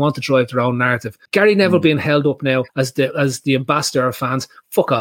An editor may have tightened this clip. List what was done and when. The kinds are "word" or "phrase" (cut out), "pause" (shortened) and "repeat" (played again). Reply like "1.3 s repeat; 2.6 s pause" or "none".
1.3 s pause; 2.7 s pause